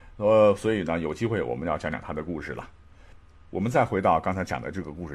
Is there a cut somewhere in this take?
no; 0 cuts

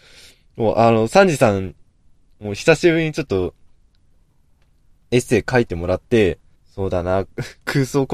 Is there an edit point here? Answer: yes; 1 cut; at 6.6 s

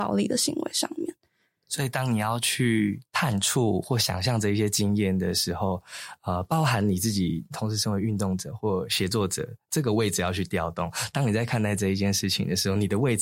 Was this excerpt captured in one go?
yes; 0 cuts

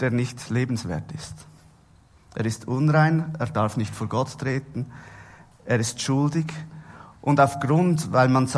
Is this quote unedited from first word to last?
yes; 0 cuts

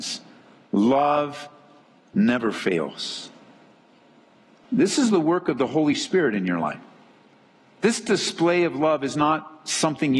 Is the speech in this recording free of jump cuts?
yes; 0 cuts

